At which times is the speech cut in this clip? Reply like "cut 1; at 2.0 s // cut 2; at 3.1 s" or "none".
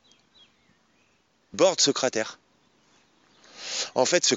cut 1; at 1.5 s